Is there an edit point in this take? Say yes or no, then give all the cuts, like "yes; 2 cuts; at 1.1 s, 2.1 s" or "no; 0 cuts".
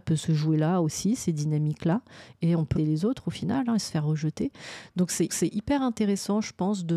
yes; 2 cuts; at 2.8 s, 5.3 s